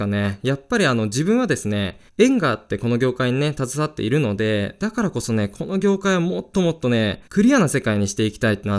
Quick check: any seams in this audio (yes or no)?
yes